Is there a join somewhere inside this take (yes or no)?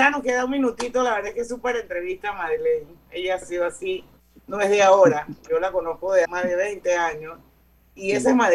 yes